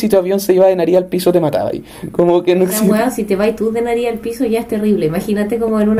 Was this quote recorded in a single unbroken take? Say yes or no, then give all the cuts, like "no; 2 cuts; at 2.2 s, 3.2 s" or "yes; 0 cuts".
yes; 0 cuts